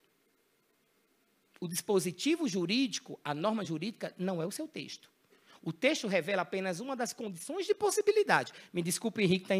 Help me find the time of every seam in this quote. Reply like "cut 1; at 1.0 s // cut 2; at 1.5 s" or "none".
none